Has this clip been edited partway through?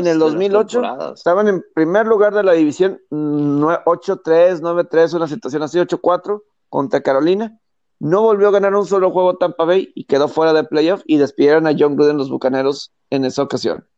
no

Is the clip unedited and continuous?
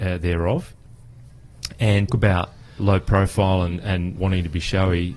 no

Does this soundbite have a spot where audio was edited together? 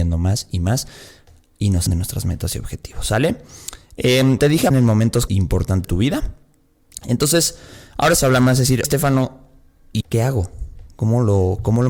yes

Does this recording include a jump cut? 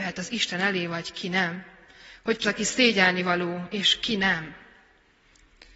yes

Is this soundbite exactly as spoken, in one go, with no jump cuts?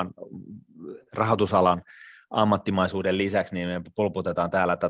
yes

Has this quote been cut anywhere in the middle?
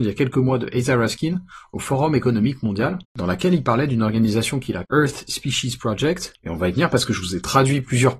yes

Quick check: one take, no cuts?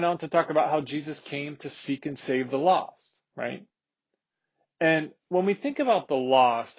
yes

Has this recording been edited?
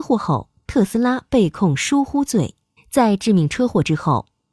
yes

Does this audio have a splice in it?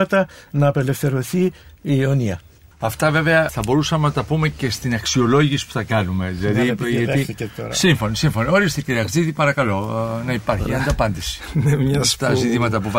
no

